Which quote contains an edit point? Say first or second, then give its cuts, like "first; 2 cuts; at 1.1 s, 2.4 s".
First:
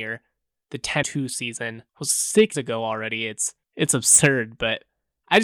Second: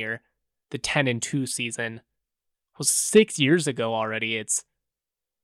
first; 4 cuts; at 1.0 s, 1.9 s, 2.5 s, 3.6 s